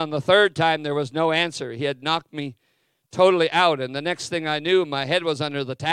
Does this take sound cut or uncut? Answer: uncut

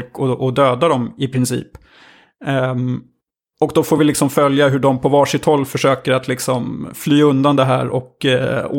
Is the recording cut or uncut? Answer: uncut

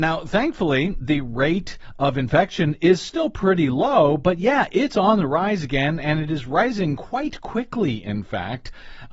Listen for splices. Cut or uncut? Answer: uncut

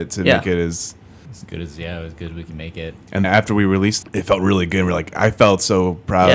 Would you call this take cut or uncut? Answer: cut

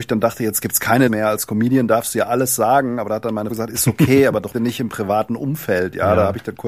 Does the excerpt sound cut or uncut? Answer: cut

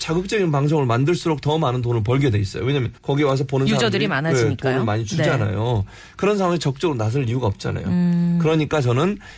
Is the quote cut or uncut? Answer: cut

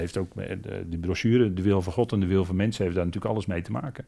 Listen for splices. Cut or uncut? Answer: uncut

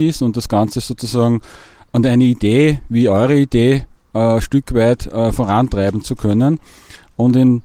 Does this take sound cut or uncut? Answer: uncut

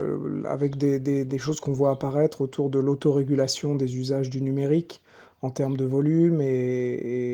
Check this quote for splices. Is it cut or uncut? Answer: uncut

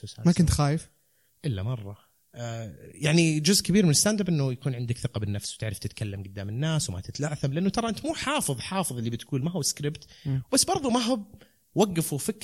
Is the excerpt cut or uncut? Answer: uncut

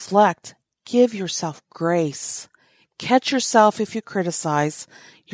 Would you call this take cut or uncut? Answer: uncut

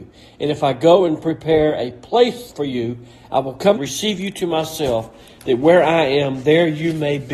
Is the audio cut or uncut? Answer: cut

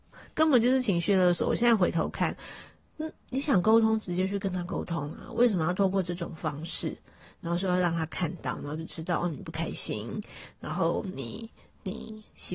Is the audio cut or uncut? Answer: uncut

